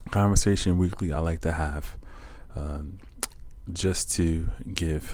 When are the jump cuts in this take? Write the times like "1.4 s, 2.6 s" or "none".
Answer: none